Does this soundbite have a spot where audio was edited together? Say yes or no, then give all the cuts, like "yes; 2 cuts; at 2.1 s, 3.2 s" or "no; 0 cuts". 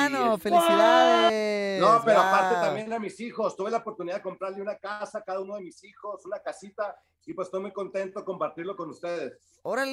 no; 0 cuts